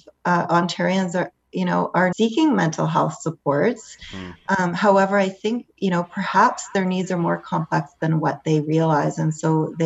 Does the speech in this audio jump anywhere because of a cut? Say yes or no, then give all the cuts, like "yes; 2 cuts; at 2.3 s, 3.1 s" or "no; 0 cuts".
yes; 1 cut; at 2.1 s